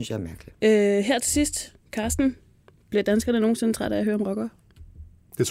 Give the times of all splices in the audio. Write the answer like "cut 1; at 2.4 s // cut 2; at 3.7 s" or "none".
cut 1; at 1.8 s